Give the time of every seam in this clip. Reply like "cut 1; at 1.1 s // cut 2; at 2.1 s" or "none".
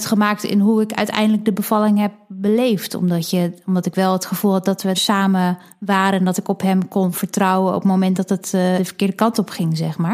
cut 1; at 4.9 s // cut 2; at 8.8 s